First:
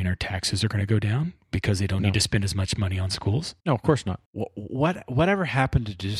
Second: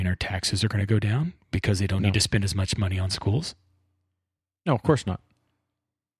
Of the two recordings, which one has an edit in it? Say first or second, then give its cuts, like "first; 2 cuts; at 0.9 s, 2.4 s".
first; 2 cuts; at 3.6 s, 4.3 s